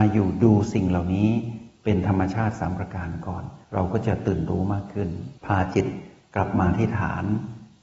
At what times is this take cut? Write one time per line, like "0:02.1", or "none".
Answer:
0:03.6
0:05.4